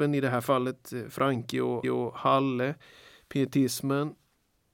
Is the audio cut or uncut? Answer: cut